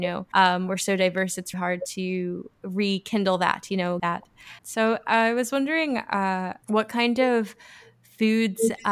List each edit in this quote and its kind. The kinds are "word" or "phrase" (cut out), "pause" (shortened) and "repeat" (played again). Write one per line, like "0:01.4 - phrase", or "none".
0:01.5 - word
0:04.0 - phrase
0:04.6 - pause
0:06.6 - pause